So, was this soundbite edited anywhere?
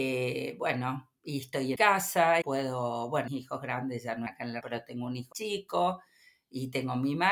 yes; 6 cuts; at 1.8 s, 2.4 s, 3.3 s, 4.3 s, 4.6 s, 5.3 s

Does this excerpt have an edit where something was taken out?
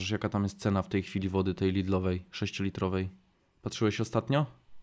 yes; 1 cut; at 3.3 s

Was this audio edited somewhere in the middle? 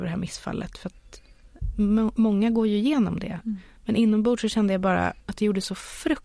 yes; 1 cut; at 5.2 s

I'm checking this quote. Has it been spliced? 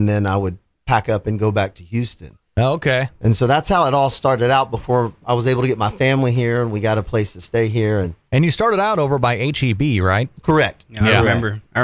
no; 0 cuts

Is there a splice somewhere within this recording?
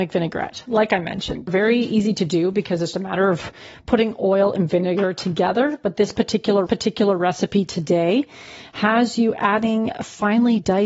yes; 3 cuts; at 1.5 s, 2.9 s, 6.7 s

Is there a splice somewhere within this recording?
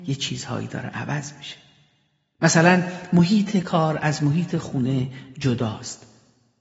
no; 0 cuts

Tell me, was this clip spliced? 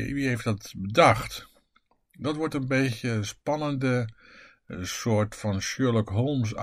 no; 0 cuts

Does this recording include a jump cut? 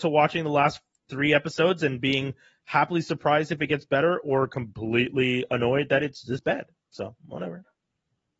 no; 0 cuts

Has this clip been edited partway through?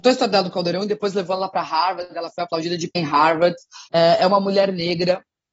yes; 2 cuts; at 2.9 s, 3.9 s

